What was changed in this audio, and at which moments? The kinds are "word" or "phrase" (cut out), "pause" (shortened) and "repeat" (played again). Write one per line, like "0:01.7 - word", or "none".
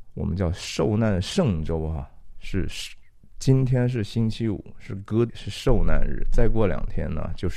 0:05.3 - word